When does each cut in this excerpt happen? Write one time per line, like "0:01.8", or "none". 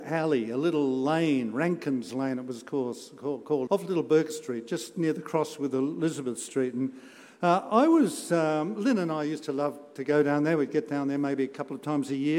0:03.7